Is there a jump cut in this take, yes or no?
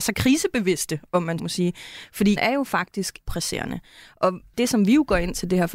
yes